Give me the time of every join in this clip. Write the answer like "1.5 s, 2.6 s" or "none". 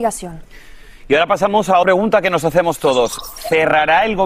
1.8 s